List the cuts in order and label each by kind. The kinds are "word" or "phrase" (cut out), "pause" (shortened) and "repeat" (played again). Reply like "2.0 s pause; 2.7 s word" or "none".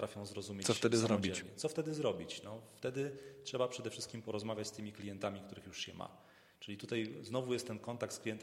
none